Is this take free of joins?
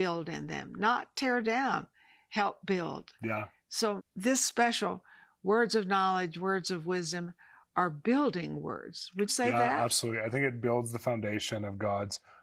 no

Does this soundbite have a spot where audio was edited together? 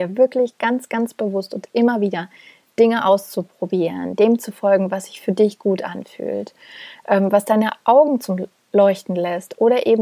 no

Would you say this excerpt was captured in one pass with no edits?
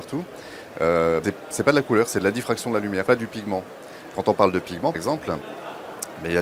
no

